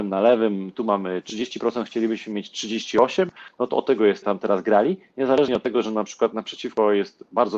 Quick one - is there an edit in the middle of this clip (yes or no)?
yes